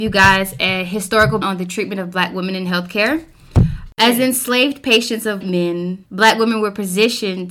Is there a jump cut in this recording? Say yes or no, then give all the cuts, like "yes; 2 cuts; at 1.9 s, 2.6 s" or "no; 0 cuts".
yes; 2 cuts; at 1.4 s, 5.4 s